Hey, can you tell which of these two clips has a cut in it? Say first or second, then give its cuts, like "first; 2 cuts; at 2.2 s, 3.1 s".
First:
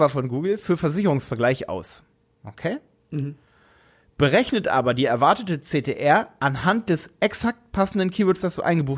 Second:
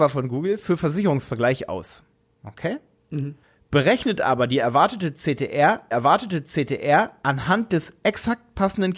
second; 2 cuts; at 3.4 s, 5.9 s